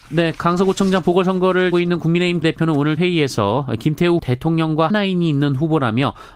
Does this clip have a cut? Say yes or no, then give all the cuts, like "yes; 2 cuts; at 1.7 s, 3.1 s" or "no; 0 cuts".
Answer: yes; 5 cuts; at 1.7 s, 2.4 s, 3.0 s, 4.2 s, 4.9 s